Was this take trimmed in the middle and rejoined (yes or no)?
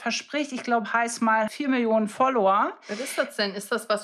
yes